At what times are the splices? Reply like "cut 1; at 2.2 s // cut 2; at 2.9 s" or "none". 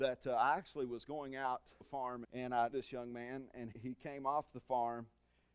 cut 1; at 1.8 s // cut 2; at 2.2 s // cut 3; at 2.7 s // cut 4; at 3.7 s